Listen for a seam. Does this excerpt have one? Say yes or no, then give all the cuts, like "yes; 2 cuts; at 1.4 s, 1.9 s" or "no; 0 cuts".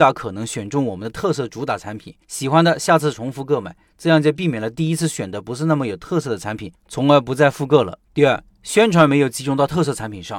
yes; 2 cuts; at 2.2 s, 8.0 s